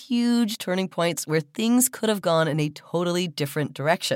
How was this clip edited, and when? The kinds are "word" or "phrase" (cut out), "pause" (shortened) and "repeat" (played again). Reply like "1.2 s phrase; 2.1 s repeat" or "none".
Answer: none

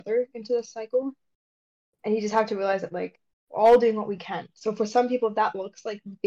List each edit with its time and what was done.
none

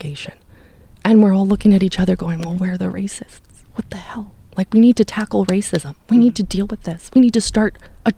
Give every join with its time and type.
none

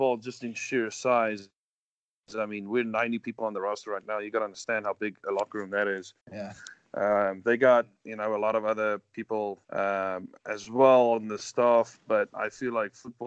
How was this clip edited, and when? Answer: 6.2 s pause; 9.6 s pause

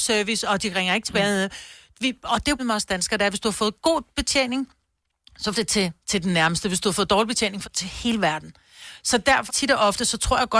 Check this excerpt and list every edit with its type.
2.6 s word; 5.5 s word; 7.6 s word; 9.5 s word

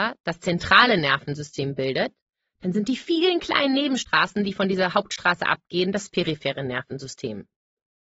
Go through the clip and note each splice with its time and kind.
none

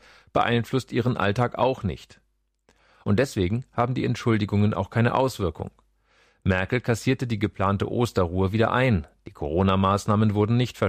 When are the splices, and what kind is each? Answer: none

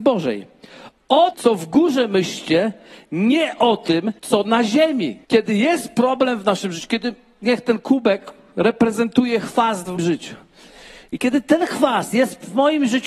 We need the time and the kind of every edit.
1.3 s word; 4.2 s pause; 5.2 s pause; 10.0 s word

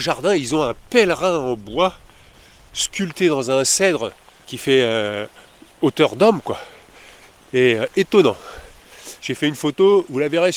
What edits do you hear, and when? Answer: 4.4 s word

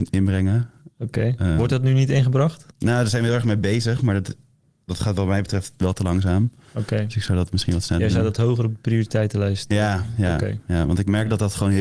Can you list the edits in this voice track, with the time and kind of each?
2.7 s pause

